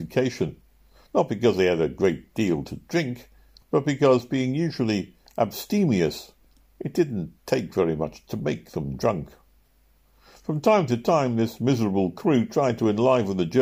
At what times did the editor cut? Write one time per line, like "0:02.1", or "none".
none